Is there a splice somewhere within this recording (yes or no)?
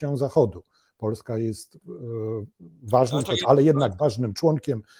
yes